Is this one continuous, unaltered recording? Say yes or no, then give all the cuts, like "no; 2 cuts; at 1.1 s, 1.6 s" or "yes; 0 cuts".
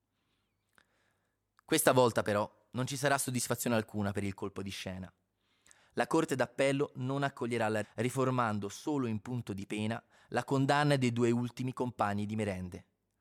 no; 1 cut; at 7.8 s